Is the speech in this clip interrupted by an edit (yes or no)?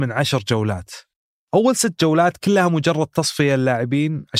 no